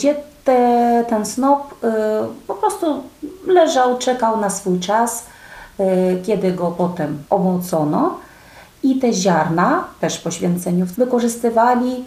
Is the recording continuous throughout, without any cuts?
no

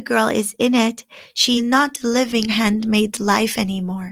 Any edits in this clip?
yes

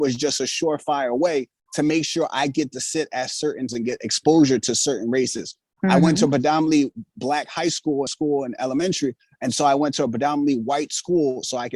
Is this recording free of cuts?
no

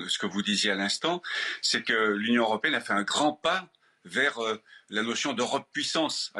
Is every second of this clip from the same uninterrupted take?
yes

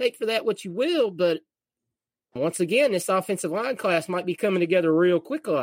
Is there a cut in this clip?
yes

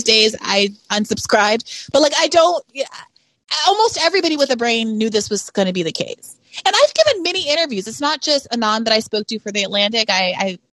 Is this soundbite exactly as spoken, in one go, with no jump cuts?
yes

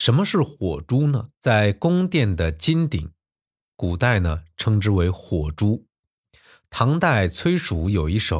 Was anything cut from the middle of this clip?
yes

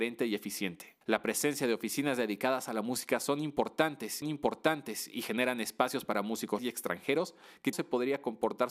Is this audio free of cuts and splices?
no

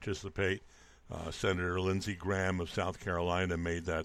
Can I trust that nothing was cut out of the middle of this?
yes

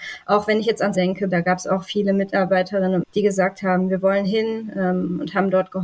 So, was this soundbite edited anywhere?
yes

